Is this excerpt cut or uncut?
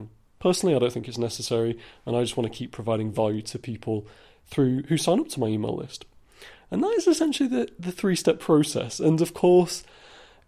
uncut